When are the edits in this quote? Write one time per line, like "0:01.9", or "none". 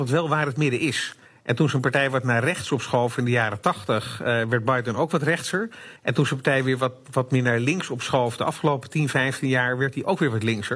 0:01.3
0:06.0